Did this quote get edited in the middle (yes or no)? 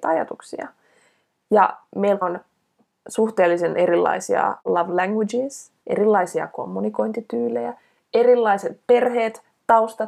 yes